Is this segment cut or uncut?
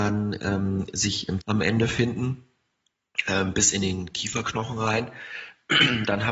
cut